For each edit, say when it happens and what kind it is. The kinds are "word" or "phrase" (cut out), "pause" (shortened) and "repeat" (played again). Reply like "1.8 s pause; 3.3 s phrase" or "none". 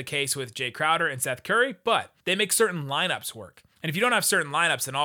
2.2 s pause; 3.7 s pause